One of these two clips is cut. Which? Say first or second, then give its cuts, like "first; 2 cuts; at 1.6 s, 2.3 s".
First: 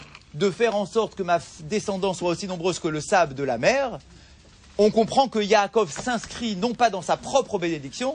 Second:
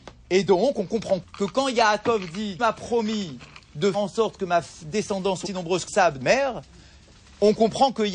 second; 6 cuts; at 1.2 s, 2.6 s, 3.9 s, 5.4 s, 5.9 s, 6.2 s